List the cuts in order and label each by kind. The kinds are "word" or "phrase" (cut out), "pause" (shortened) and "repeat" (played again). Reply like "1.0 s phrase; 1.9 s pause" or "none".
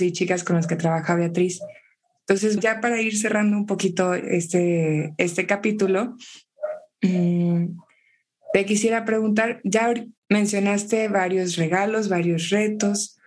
2.6 s word; 10.2 s pause